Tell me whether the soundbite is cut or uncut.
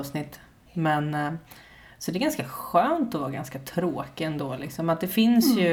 uncut